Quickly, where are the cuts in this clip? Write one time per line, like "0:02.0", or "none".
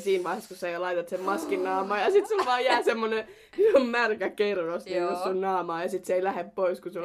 none